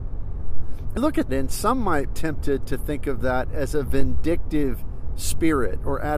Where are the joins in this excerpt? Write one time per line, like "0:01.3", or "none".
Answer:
0:01.0
0:01.3
0:02.1